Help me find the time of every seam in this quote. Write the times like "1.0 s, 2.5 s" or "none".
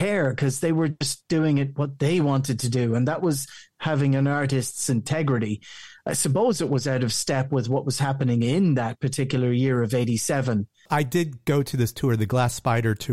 none